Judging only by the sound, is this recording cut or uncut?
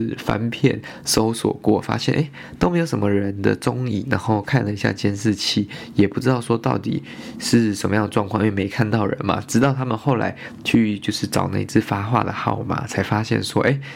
uncut